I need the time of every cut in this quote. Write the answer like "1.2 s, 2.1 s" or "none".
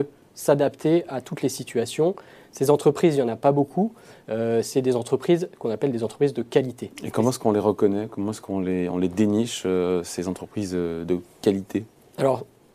none